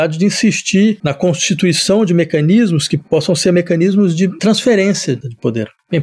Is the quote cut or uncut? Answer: uncut